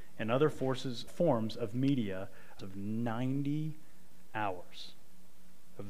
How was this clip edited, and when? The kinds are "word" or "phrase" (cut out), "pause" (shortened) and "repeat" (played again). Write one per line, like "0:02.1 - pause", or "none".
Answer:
0:01.1 - word
0:02.6 - phrase